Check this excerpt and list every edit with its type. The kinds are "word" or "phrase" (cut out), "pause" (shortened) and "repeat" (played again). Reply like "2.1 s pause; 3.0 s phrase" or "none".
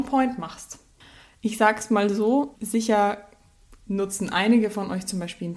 2.5 s word